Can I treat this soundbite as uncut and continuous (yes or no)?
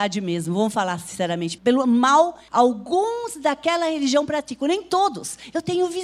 no